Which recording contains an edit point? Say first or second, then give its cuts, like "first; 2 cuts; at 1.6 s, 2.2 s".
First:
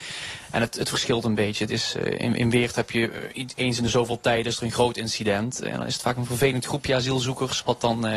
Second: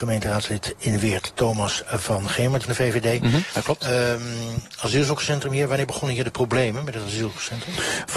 second; 1 cut; at 2.6 s